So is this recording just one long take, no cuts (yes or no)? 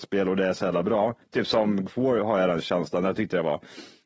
no